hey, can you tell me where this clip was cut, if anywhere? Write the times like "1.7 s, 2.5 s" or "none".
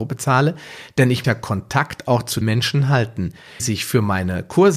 1.2 s, 2.4 s, 3.6 s